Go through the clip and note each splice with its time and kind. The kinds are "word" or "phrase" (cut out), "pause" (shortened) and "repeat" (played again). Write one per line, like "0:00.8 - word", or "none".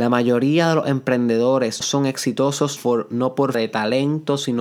0:01.8 - word
0:02.8 - word
0:03.5 - word

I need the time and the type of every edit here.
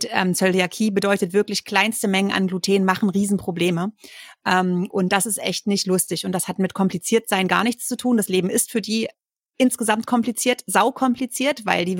none

